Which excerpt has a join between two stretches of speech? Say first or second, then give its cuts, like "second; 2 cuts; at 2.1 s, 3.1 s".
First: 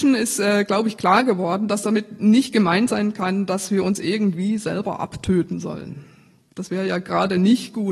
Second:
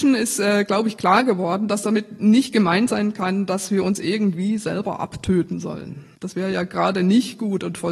second; 1 cut; at 6.1 s